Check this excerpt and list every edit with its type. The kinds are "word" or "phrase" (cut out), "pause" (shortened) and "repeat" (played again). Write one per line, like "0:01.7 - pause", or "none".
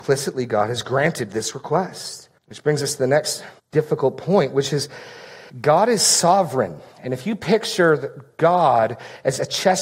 0:02.4 - pause
0:03.6 - pause
0:05.5 - pause
0:06.9 - pause